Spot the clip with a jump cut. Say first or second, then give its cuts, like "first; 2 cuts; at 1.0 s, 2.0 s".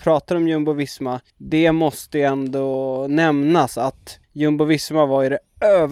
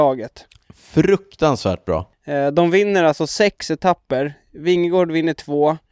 first; 2 cuts; at 1.3 s, 4.2 s